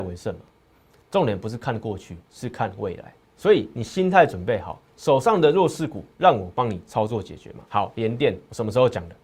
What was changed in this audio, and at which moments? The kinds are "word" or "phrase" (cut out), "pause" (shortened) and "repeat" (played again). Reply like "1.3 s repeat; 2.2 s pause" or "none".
3.2 s pause; 4.8 s pause; 7.7 s pause